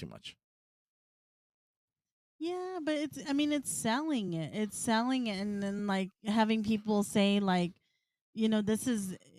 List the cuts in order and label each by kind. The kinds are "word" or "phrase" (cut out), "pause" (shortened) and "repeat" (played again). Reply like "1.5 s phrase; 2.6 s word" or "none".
none